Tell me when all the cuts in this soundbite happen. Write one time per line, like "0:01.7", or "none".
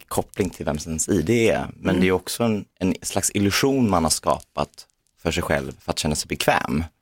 none